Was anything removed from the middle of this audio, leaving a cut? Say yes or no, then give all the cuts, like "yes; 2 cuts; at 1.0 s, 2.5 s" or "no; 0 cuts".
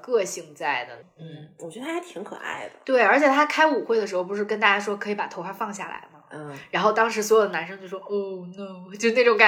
no; 0 cuts